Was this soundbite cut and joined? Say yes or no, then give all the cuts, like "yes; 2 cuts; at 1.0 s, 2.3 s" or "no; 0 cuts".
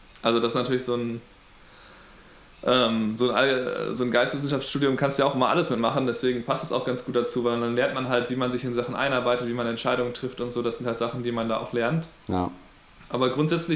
no; 0 cuts